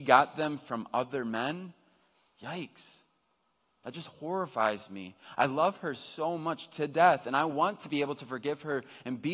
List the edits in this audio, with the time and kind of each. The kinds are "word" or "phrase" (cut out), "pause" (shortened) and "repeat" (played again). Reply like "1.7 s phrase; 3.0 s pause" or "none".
none